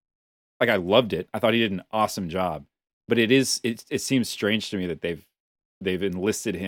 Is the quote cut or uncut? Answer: uncut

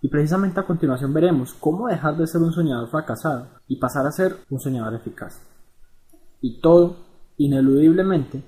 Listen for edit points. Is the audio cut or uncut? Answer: cut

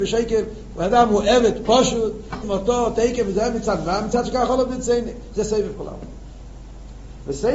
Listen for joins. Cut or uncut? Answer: cut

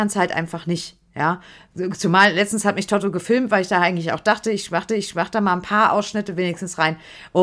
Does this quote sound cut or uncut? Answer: cut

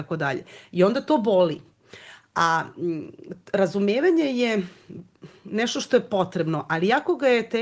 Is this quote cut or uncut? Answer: uncut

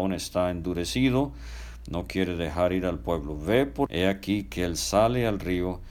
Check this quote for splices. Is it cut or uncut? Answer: cut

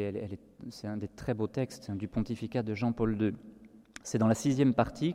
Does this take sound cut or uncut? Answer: uncut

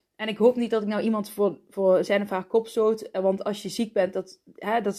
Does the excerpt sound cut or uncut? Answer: uncut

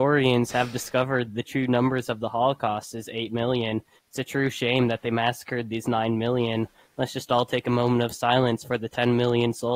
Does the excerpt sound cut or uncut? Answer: uncut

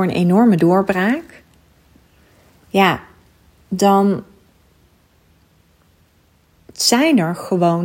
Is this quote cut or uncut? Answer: uncut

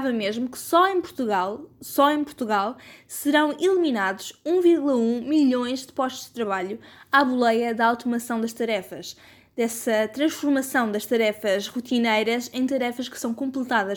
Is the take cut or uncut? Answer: uncut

